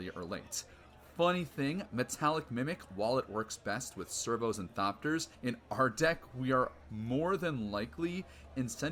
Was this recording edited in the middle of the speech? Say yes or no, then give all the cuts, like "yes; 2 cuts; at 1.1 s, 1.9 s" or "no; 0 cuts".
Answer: yes; 1 cut; at 5.3 s